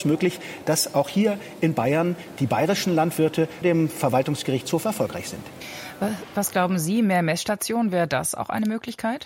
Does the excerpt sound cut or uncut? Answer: cut